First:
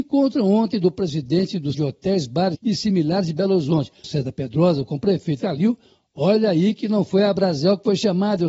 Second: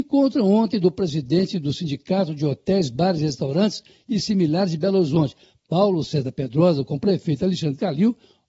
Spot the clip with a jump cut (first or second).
first